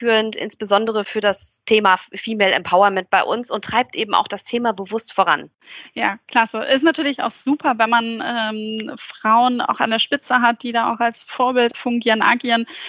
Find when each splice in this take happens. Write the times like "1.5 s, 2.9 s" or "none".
none